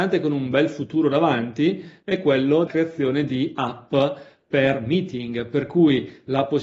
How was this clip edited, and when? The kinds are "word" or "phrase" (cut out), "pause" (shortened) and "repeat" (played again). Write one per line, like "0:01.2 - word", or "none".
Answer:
0:02.7 - word